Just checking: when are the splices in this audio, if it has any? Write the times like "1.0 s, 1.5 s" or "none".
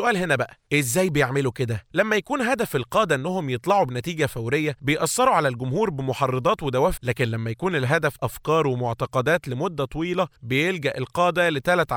7.0 s, 8.2 s